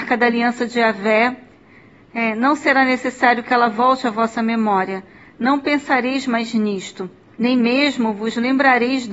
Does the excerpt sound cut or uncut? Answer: uncut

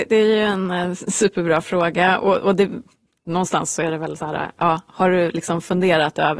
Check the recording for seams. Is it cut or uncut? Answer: uncut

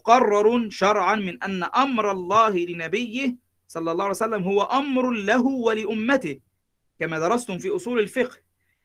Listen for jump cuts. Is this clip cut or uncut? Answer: cut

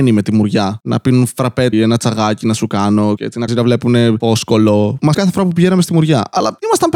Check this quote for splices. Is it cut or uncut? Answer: cut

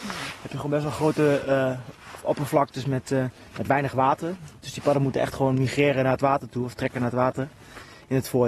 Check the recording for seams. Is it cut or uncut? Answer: uncut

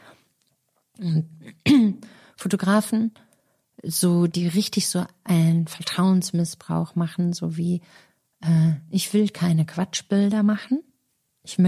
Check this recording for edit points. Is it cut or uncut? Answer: uncut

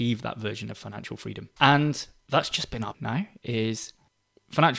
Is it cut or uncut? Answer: cut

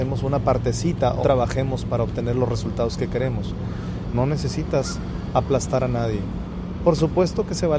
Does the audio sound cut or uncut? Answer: cut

